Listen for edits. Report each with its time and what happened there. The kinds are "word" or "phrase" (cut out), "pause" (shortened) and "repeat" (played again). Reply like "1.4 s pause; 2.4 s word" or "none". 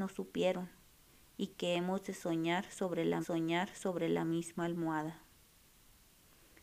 3.2 s repeat